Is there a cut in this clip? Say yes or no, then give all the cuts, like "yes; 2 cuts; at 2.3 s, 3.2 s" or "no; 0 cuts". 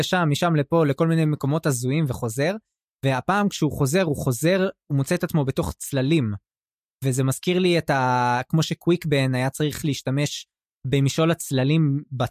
no; 0 cuts